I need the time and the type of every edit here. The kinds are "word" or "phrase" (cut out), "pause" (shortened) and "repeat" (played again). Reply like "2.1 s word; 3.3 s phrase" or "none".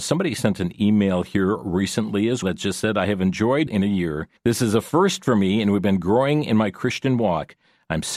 2.4 s word; 3.7 s phrase; 4.4 s pause